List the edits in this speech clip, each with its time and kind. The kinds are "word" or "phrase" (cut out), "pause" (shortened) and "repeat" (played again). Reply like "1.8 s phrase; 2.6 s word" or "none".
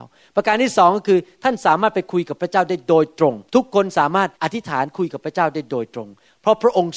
3.5 s pause; 4.3 s pause